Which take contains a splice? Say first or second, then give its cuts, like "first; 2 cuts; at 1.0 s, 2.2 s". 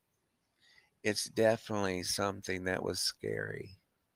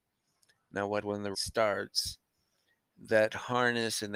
second; 2 cuts; at 1.0 s, 1.3 s